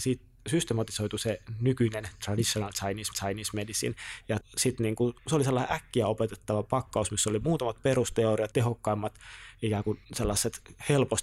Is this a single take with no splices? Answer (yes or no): no